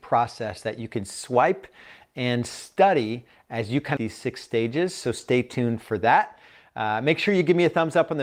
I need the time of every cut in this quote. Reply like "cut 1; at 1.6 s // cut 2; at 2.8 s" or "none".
cut 1; at 4.0 s